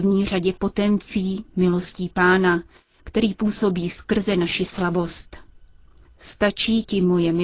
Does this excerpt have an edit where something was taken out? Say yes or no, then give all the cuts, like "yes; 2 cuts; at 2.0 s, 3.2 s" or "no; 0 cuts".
no; 0 cuts